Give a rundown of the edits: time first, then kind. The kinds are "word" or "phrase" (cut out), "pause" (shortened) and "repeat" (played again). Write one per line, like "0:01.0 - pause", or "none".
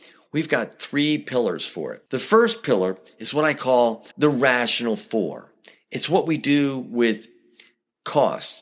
0:02.1 - pause
0:04.1 - pause